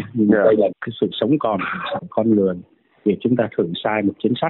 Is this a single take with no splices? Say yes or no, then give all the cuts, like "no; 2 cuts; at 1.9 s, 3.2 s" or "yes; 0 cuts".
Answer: no; 1 cut; at 2.0 s